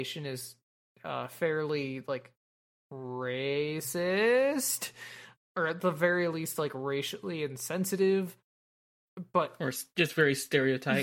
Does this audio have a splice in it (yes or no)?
no